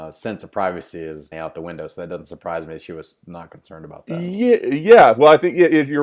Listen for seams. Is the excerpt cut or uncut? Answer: cut